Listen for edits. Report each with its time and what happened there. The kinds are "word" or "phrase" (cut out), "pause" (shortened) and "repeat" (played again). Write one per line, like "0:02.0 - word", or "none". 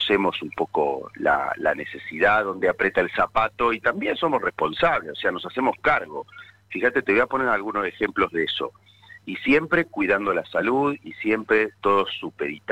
none